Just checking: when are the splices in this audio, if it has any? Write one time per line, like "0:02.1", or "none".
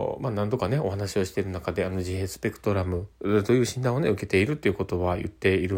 0:03.1